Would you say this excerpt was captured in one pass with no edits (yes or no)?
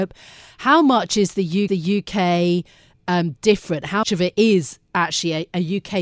no